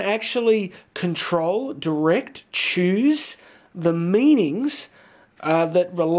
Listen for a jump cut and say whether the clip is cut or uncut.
uncut